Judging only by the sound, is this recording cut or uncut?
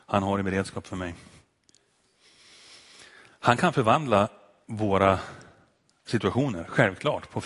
uncut